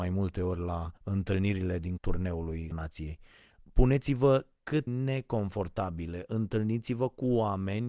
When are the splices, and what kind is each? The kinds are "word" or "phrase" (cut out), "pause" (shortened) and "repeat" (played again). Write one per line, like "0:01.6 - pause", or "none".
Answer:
0:01.0 - pause
0:02.0 - word
0:02.7 - word
0:04.9 - phrase